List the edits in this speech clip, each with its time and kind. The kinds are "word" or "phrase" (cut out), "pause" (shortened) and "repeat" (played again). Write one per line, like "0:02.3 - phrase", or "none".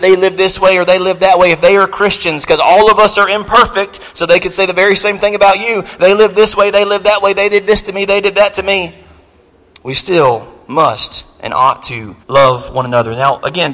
0:12.2 - pause